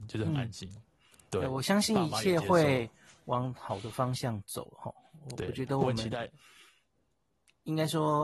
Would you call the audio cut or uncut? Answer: uncut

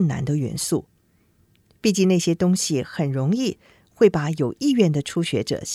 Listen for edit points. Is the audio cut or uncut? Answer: uncut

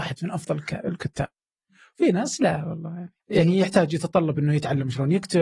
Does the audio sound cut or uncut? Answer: cut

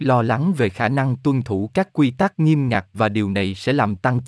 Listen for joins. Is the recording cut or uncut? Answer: uncut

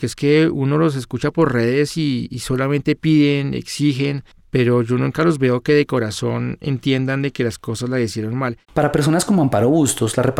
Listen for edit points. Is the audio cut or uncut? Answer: cut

